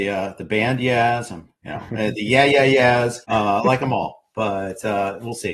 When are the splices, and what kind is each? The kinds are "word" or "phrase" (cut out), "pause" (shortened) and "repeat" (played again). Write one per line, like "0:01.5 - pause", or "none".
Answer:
0:03.2 - pause

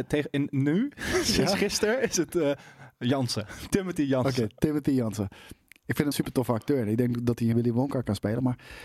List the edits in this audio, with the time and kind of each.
0:06.1 - word
0:07.5 - phrase

